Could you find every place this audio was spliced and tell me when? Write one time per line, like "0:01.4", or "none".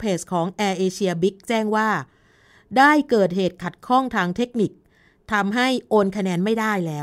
none